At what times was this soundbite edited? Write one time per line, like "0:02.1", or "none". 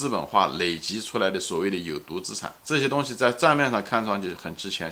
0:02.6